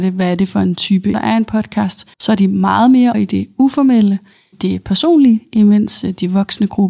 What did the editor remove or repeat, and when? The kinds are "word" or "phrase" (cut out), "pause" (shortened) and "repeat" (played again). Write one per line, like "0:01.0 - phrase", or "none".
0:01.1 - word
0:02.1 - pause
0:03.1 - word
0:04.5 - word